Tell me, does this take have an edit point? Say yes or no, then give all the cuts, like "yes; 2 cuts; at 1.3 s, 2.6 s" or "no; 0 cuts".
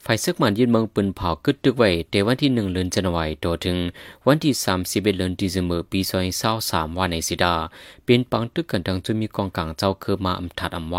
no; 0 cuts